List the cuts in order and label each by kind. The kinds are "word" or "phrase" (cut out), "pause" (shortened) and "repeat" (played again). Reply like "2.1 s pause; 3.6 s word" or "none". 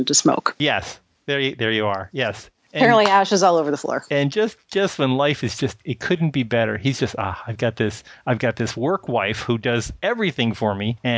none

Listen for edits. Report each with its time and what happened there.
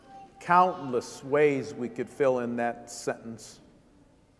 none

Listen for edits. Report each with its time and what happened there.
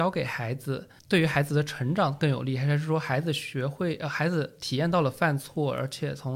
1.0 s pause

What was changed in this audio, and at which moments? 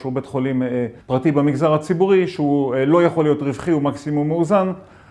1.0 s pause

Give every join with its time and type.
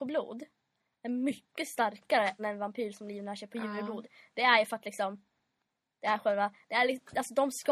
2.4 s word

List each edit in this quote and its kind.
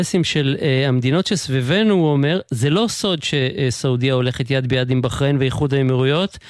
none

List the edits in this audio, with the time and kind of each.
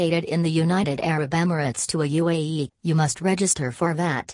2.7 s word

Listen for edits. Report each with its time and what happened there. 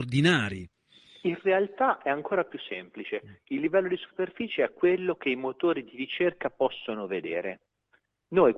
none

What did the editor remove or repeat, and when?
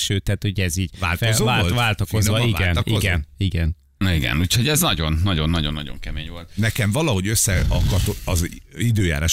none

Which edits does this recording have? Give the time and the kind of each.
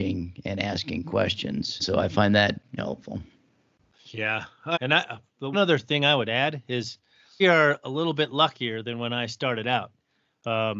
1.8 s word; 2.8 s word; 4.7 s word; 5.5 s word; 7.4 s word

